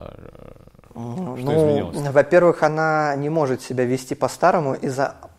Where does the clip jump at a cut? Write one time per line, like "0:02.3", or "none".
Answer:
none